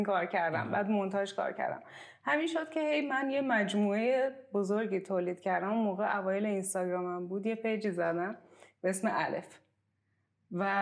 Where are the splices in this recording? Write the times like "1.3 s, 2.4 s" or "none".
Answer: none